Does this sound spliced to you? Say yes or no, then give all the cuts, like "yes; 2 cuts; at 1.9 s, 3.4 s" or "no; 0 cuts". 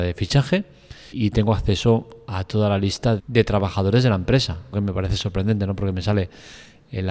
yes; 3 cuts; at 1.1 s, 3.2 s, 4.7 s